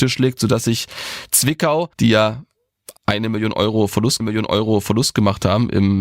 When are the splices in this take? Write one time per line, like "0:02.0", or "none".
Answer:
0:01.9
0:03.0
0:04.2

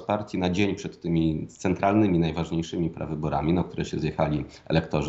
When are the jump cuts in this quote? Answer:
none

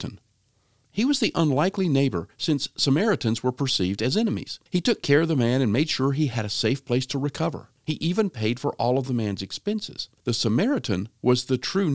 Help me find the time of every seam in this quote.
0:04.7
0:07.8
0:10.2

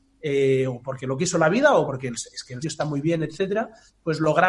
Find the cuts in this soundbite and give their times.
0:01.9
0:02.6

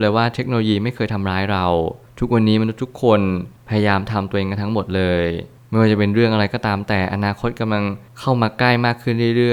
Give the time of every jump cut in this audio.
none

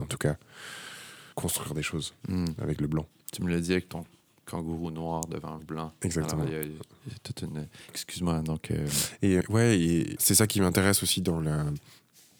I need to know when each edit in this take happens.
0:01.3
0:05.6
0:09.4

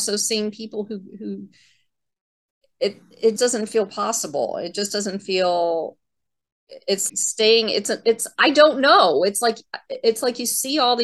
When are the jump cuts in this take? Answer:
0:03.4
0:07.1

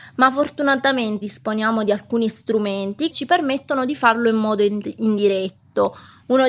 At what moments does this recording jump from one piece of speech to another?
0:01.2
0:03.1

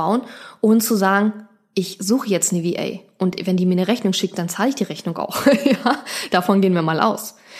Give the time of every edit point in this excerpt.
none

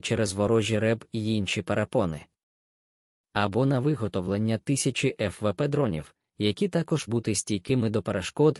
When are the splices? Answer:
0:07.1

